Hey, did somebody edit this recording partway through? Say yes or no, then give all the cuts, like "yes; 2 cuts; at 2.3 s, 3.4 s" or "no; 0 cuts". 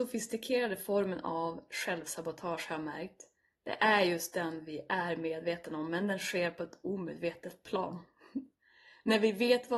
no; 0 cuts